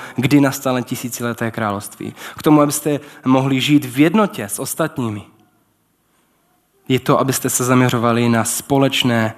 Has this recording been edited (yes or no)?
no